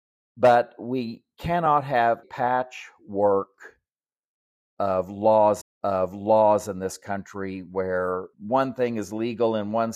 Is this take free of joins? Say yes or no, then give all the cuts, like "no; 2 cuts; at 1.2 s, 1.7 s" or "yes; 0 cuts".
no; 3 cuts; at 2.2 s, 5.6 s, 8.3 s